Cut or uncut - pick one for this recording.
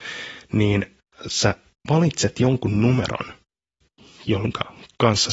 uncut